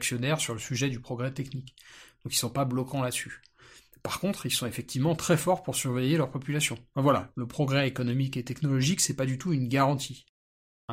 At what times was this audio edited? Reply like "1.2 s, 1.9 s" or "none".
none